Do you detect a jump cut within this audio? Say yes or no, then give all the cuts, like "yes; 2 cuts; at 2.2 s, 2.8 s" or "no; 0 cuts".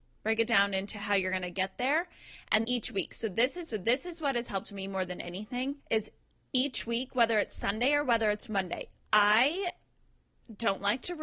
yes; 3 cuts; at 2.6 s, 3.7 s, 5.8 s